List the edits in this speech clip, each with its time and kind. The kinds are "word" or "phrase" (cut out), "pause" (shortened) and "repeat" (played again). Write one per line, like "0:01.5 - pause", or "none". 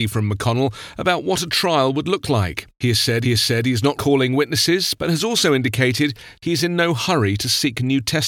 0:03.2 - repeat
0:04.0 - phrase